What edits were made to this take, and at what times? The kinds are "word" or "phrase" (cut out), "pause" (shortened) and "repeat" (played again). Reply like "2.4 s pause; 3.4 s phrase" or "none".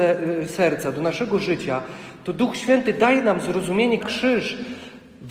4.0 s phrase